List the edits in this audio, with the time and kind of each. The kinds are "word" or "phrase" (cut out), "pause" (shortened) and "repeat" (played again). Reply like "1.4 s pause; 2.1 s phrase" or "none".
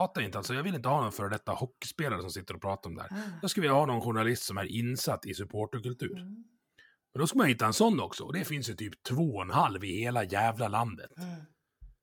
none